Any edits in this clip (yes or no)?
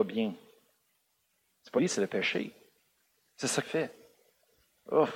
yes